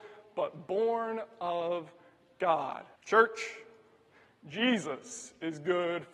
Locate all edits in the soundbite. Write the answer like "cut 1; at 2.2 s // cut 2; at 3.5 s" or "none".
cut 1; at 3.0 s